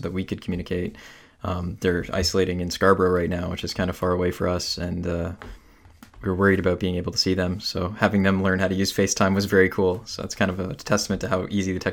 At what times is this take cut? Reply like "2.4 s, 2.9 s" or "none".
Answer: none